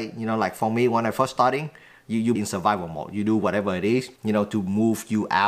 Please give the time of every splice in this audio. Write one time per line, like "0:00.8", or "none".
0:02.3
0:04.2